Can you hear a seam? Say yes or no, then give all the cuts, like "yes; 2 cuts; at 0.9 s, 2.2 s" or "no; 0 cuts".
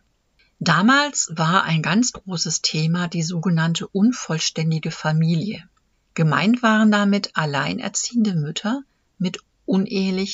no; 0 cuts